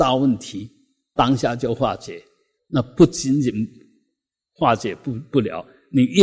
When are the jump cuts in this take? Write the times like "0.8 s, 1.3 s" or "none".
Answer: 2.6 s